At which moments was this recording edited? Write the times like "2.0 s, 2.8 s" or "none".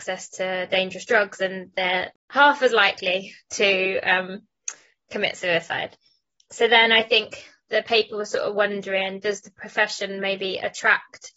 none